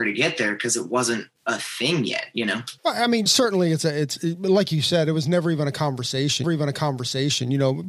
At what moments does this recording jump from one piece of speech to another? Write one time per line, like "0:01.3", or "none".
0:01.4
0:02.8
0:03.3
0:06.4